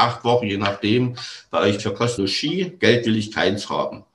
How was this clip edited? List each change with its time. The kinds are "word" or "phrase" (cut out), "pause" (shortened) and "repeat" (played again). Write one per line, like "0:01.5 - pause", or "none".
0:01.8 - word
0:02.2 - word